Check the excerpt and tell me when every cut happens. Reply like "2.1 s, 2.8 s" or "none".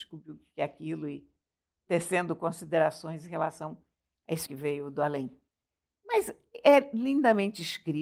4.4 s